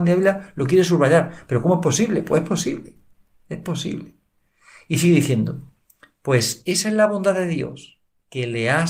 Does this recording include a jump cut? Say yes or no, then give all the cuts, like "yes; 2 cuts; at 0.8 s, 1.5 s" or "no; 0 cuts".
no; 0 cuts